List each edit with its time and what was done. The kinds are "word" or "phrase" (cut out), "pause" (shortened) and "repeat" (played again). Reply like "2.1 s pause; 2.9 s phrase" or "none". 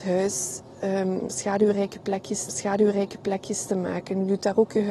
2.5 s repeat